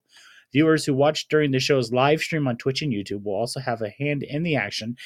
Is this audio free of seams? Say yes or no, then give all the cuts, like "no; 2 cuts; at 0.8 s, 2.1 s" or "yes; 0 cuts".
yes; 0 cuts